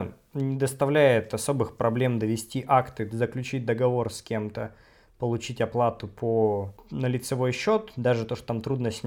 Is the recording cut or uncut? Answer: uncut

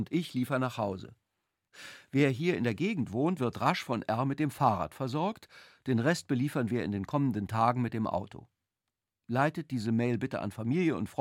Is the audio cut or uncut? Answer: uncut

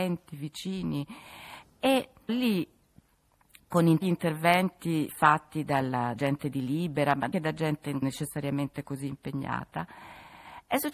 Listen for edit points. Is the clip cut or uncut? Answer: cut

